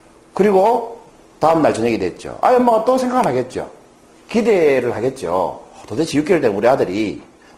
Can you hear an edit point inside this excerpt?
no; 0 cuts

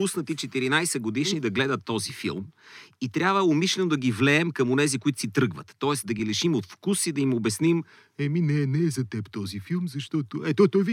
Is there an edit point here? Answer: no; 0 cuts

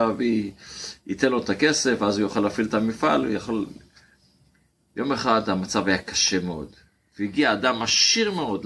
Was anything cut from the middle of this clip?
no; 0 cuts

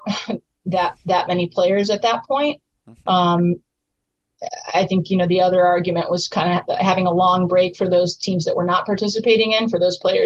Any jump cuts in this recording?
no; 0 cuts

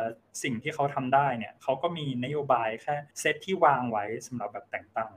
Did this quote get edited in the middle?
yes; 1 cut; at 3.1 s

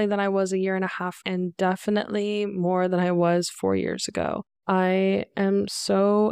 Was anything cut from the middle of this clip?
yes; 2 cuts; at 1.2 s, 4.6 s

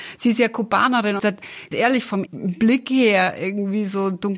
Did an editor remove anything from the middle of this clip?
yes; 3 cuts; at 1.2 s, 1.7 s, 2.3 s

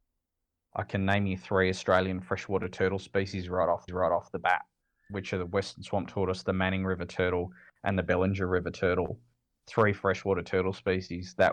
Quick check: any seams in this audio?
yes; 1 cut; at 3.9 s

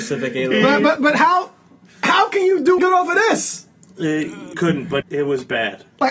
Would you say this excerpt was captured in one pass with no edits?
no; 4 cuts; at 1.0 s, 2.8 s, 4.5 s, 5.0 s

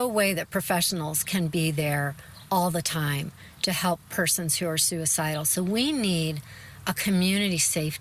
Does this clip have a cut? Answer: no; 0 cuts

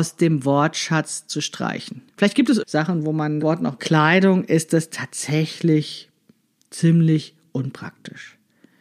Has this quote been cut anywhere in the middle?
yes; 4 cuts; at 2.1 s, 2.6 s, 3.4 s, 3.8 s

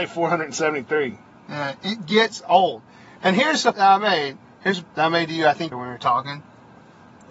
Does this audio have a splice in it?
yes; 3 cuts; at 3.7 s, 4.8 s, 5.7 s

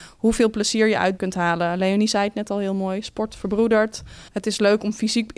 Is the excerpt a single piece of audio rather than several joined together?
no; 2 cuts; at 1.2 s, 4.3 s

